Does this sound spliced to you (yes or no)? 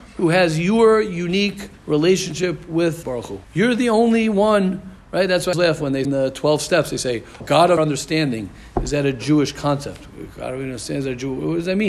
yes